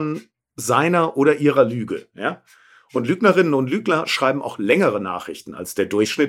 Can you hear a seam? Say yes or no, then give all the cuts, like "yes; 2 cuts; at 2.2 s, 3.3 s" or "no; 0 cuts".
no; 0 cuts